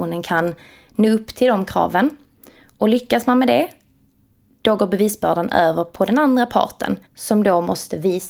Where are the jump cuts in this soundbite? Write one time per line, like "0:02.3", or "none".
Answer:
0:07.1